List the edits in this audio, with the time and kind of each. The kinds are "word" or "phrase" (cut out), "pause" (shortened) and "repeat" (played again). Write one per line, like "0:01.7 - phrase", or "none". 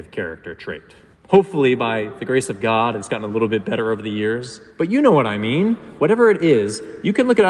0:01.1 - pause
0:04.7 - pause